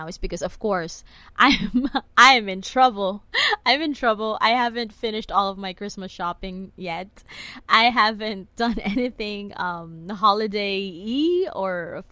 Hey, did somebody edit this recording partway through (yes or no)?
no